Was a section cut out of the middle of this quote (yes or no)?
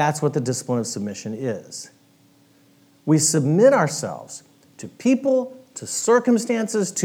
no